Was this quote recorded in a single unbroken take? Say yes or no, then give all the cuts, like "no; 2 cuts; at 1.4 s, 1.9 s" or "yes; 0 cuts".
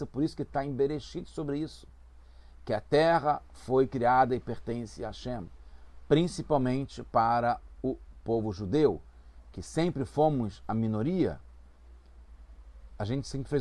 yes; 0 cuts